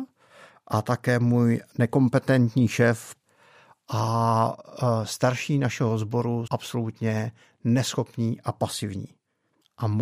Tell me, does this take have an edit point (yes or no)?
yes